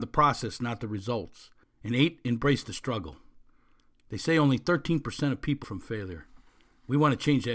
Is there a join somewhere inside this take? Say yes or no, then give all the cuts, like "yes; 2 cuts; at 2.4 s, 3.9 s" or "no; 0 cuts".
yes; 2 cuts; at 1.6 s, 5.6 s